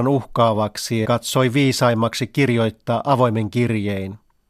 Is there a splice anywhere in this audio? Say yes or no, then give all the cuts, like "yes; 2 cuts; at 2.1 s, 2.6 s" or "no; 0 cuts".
yes; 1 cut; at 1.0 s